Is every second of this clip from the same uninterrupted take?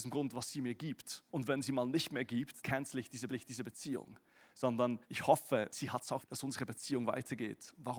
no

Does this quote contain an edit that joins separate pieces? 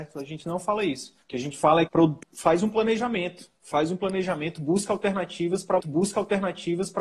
yes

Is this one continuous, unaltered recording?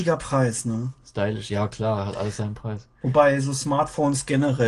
yes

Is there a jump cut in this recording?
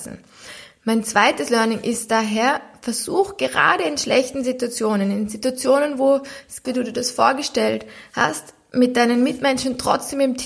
yes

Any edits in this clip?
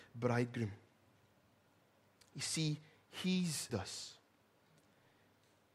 yes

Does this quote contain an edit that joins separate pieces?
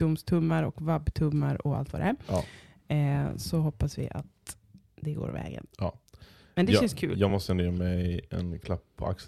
no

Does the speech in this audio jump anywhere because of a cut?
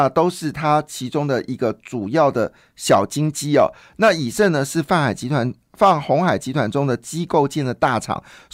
no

